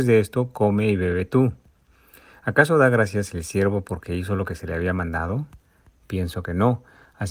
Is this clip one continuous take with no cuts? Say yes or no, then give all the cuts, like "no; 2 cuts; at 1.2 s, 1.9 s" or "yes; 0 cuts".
yes; 0 cuts